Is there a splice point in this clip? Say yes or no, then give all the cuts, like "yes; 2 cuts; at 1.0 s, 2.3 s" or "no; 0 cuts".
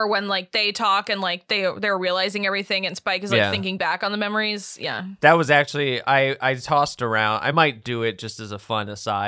no; 0 cuts